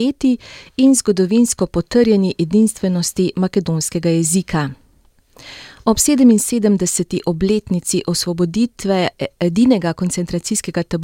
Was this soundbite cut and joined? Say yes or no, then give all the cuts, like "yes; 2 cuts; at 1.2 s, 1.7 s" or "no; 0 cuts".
no; 0 cuts